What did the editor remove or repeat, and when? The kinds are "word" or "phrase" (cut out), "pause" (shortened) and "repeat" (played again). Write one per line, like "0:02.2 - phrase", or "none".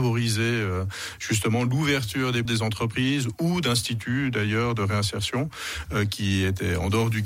0:02.5 - word